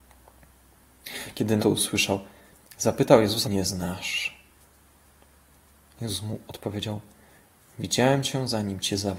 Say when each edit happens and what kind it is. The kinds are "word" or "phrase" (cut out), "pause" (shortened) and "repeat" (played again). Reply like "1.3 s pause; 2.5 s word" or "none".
1.6 s word; 3.4 s word